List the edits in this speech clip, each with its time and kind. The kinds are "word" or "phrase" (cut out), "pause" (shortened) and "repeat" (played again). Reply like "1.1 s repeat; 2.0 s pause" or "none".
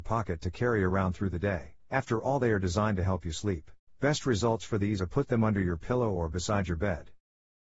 1.8 s pause; 3.9 s pause; 5.0 s word